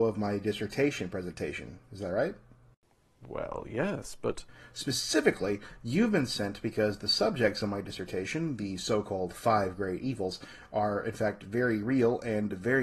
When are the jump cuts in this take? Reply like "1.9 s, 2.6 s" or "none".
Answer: none